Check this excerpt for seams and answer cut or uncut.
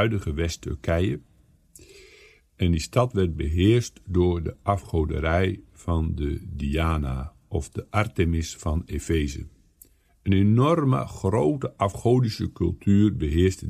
uncut